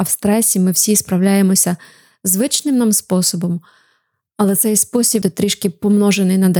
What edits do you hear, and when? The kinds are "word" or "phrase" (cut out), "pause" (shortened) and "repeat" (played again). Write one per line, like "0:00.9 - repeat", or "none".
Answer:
0:05.2 - phrase